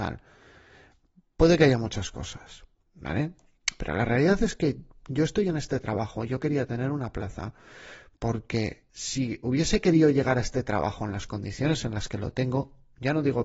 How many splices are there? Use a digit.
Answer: 1